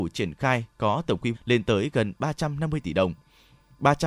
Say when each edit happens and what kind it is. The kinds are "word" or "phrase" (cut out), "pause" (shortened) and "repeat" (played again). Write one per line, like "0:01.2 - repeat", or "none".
0:01.3 - word